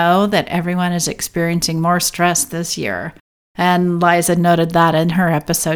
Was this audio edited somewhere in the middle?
no; 0 cuts

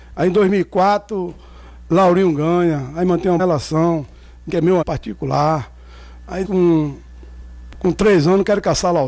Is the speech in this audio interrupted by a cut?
yes; 4 cuts; at 3.4 s, 4.5 s, 4.8 s, 6.4 s

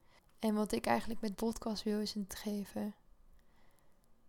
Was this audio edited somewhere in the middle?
yes; 2 cuts; at 1.3 s, 2.3 s

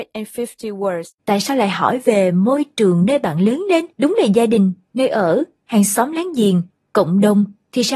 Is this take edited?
yes; 2 cuts; at 1.2 s, 3.9 s

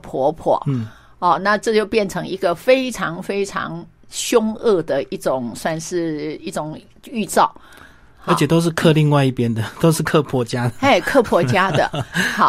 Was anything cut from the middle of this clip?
no; 0 cuts

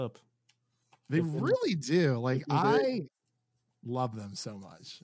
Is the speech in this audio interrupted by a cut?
no; 0 cuts

